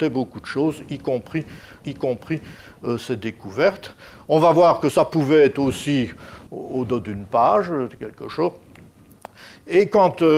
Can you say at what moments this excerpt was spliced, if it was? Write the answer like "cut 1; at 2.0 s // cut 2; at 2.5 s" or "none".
cut 1; at 1.8 s // cut 2; at 6.5 s

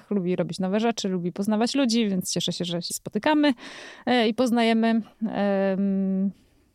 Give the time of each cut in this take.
cut 1; at 2.9 s // cut 2; at 5.1 s

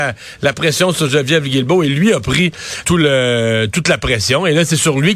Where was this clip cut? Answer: cut 1; at 2.8 s

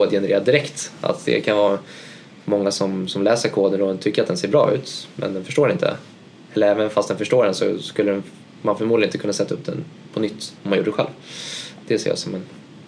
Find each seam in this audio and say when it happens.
cut 1; at 10.6 s

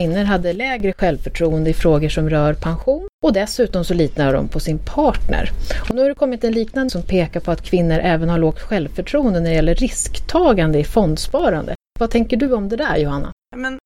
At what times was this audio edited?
cut 1; at 3.1 s // cut 2; at 6.9 s

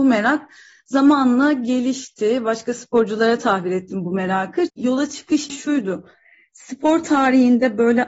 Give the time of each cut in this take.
cut 1; at 4.7 s // cut 2; at 5.5 s

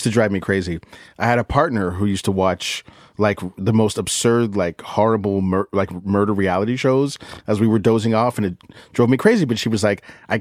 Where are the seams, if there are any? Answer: none

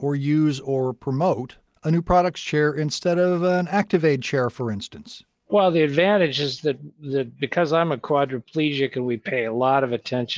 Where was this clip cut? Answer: none

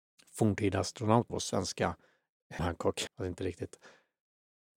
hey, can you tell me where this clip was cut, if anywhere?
cut 1; at 1.3 s // cut 2; at 2.6 s // cut 3; at 3.1 s

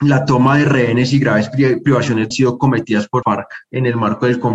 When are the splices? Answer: cut 1; at 2.3 s // cut 2; at 3.2 s // cut 3; at 3.6 s

